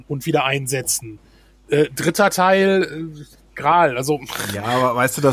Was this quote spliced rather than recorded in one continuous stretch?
no; 0 cuts

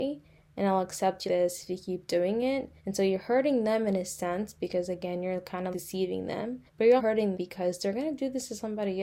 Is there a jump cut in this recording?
yes; 6 cuts; at 1.3 s, 2.8 s, 5.7 s, 6.7 s, 7.0 s, 7.3 s

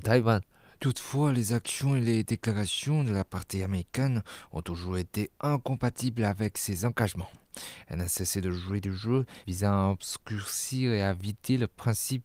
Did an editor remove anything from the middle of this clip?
no; 0 cuts

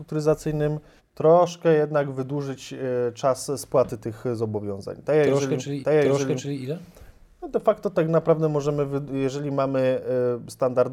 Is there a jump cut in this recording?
yes; 2 cuts; at 1.0 s, 5.8 s

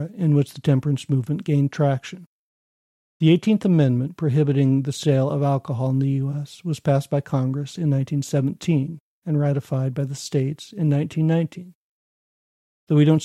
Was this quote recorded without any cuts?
yes; 0 cuts

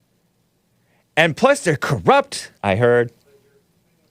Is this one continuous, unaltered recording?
no; 1 cut; at 2.6 s

